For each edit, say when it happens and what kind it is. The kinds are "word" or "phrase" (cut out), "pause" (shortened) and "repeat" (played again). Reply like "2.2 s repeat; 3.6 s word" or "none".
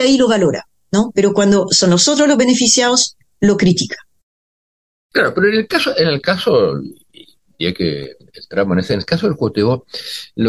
none